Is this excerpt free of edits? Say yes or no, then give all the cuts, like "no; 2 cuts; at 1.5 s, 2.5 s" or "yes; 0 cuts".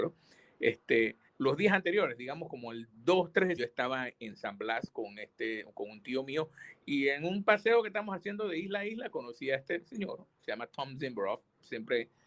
no; 2 cuts; at 1.3 s, 3.6 s